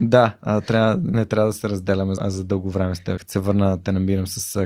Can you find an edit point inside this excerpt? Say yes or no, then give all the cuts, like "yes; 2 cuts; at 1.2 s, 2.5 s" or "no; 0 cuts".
yes; 2 cuts; at 2.2 s, 3.2 s